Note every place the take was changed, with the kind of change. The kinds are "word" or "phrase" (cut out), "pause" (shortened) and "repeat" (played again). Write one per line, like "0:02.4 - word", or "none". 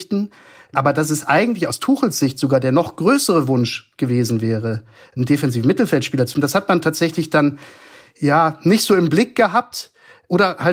0:06.3 - word